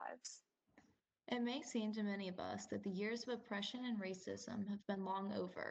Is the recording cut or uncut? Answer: uncut